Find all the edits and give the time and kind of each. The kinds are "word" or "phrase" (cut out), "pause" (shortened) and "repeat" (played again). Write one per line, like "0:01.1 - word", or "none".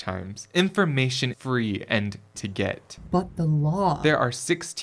0:01.3 - word
0:02.3 - word